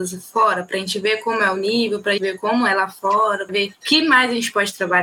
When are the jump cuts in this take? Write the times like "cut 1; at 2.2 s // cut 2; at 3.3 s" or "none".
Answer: cut 1; at 2.2 s // cut 2; at 3.5 s

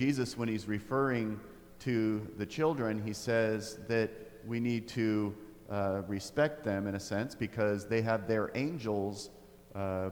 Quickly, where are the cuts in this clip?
none

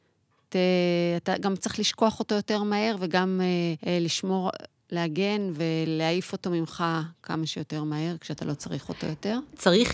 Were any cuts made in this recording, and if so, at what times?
cut 1; at 3.8 s // cut 2; at 4.7 s

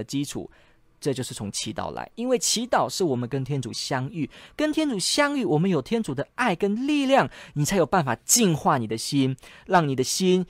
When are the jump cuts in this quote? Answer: none

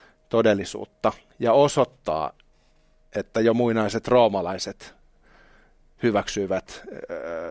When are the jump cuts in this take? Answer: none

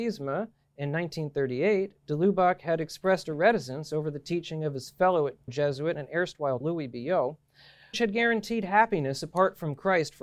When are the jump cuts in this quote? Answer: cut 1; at 5.5 s // cut 2; at 6.6 s // cut 3; at 7.9 s

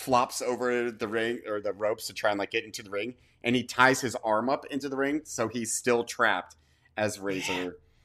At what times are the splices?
none

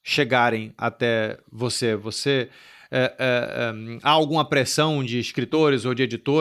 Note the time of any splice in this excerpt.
none

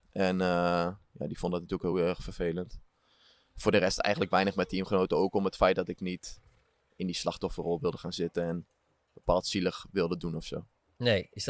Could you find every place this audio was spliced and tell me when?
none

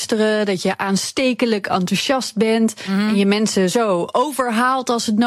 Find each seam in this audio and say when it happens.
none

